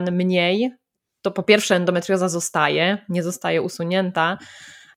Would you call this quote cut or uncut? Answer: uncut